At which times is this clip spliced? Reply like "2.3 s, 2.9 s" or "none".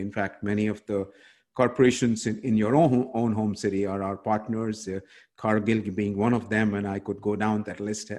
none